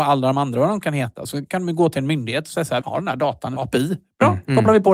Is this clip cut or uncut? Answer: cut